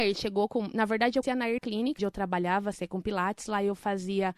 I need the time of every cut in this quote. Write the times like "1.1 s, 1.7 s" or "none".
1.2 s, 1.6 s, 2.0 s, 2.7 s